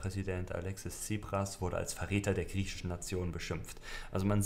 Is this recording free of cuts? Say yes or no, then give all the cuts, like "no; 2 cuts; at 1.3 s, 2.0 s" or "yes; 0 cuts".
yes; 0 cuts